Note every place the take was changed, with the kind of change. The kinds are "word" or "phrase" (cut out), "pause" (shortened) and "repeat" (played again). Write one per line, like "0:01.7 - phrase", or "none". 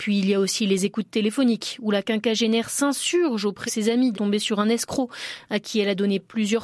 0:03.7 - word
0:04.1 - word